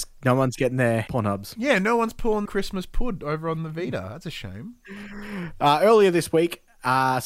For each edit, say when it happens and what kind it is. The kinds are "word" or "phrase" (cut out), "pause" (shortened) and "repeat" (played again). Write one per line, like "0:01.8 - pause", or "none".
0:01.1 - word
0:02.5 - word